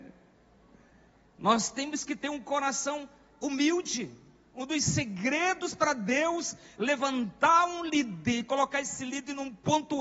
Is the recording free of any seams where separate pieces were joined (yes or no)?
yes